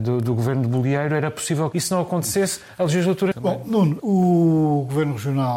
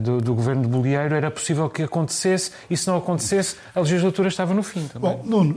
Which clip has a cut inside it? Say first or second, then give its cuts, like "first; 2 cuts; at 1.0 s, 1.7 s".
first; 3 cuts; at 1.7 s, 3.3 s, 4.0 s